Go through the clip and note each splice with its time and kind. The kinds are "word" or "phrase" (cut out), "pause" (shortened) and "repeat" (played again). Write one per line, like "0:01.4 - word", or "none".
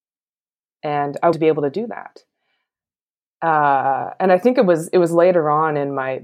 0:01.3 - word